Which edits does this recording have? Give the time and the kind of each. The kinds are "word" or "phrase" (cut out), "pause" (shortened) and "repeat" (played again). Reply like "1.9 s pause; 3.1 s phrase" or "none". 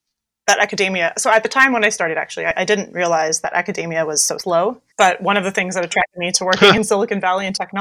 4.9 s pause